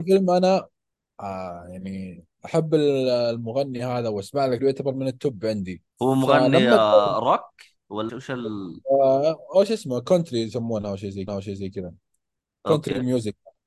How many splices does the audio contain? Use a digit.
4